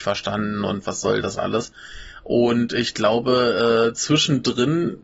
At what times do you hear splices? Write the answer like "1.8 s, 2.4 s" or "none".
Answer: none